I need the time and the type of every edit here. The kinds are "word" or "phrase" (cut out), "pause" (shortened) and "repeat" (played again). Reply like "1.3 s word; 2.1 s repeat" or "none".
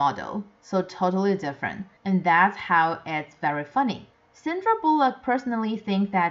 2.0 s pause